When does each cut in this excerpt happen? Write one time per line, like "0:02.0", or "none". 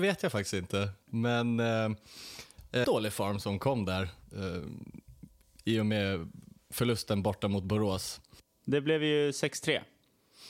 0:02.8